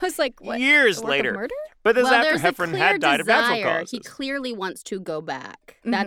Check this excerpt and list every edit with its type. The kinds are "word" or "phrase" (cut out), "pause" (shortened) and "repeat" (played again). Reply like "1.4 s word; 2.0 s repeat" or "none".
none